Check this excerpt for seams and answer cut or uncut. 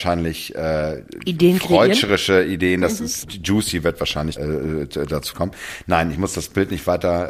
cut